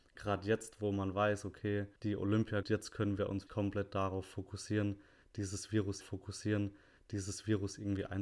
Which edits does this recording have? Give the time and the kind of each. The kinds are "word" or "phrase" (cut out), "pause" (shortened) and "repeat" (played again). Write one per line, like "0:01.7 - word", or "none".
0:02.0 - pause
0:02.6 - phrase
0:03.5 - word
0:06.0 - repeat